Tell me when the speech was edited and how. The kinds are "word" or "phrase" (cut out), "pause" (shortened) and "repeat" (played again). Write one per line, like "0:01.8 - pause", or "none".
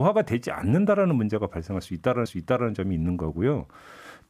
0:02.3 - repeat